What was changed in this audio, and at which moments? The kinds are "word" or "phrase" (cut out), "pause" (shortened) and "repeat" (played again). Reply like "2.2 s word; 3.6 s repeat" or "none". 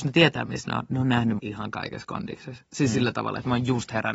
1.4 s word

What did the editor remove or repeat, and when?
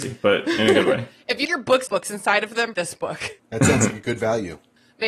1.4 s word; 1.9 s phrase; 2.7 s word; 3.4 s pause

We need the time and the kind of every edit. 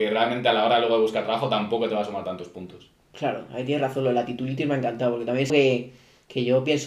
5.5 s word

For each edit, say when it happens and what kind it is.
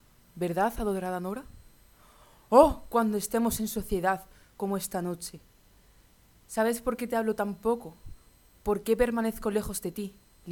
none

